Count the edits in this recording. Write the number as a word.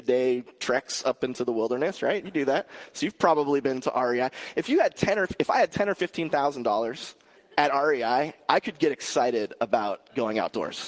one